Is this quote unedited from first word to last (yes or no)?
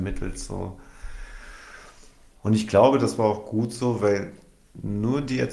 yes